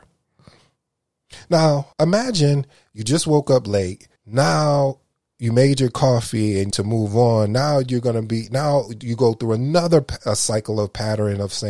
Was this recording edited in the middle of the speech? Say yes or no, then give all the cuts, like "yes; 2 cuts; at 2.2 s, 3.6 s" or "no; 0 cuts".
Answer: yes; 3 cuts; at 1.9 s, 4.2 s, 6.7 s